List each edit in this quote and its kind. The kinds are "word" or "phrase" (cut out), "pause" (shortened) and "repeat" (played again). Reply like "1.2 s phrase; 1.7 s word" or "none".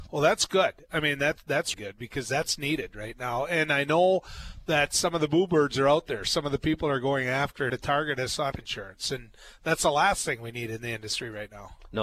1.7 s word; 7.7 s phrase; 8.5 s phrase